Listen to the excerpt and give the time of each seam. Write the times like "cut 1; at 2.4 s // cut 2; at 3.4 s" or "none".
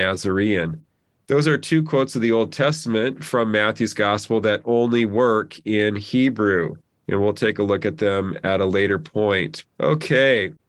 cut 1; at 6.9 s // cut 2; at 9.7 s